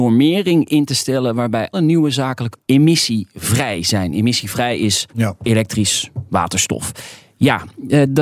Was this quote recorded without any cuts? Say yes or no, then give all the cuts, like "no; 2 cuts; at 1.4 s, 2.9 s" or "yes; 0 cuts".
no; 3 cuts; at 1.7 s, 2.5 s, 5.1 s